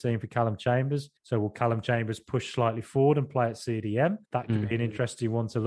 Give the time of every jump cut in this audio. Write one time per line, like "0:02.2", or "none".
0:01.2
0:04.2